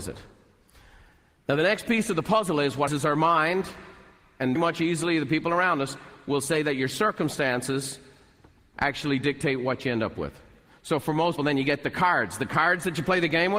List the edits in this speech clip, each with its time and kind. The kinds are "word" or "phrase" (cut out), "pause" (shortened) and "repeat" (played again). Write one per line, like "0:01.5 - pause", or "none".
0:02.9 - word
0:04.6 - word
0:11.4 - word